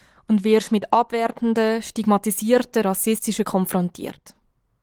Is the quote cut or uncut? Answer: cut